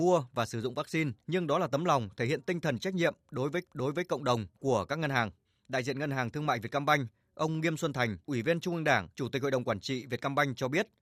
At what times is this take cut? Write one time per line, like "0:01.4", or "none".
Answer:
0:01.2
0:03.6
0:04.5
0:05.4
0:08.2
0:09.1